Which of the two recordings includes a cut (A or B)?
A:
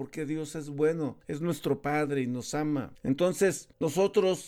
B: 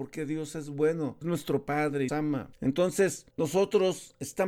B